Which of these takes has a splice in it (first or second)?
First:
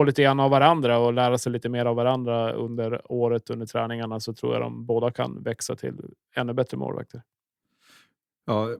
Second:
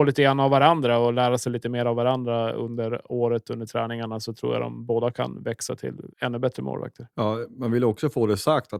second